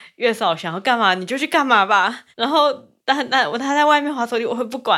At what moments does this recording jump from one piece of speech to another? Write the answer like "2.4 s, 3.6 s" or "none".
2.3 s, 3.0 s